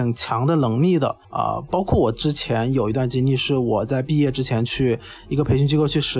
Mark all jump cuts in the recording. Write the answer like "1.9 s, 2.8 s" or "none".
1.2 s